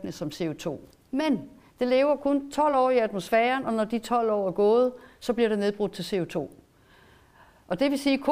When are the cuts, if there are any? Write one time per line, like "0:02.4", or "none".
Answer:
none